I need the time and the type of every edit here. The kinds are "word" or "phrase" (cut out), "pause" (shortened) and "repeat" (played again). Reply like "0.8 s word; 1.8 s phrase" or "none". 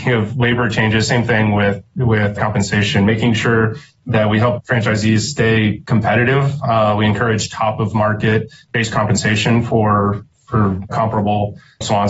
2.4 s word; 10.9 s word